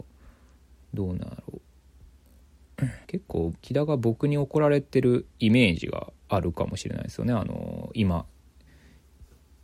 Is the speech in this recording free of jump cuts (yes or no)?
no